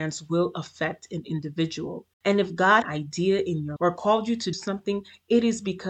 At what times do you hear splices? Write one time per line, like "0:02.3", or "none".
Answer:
0:02.1
0:02.8
0:03.8
0:04.5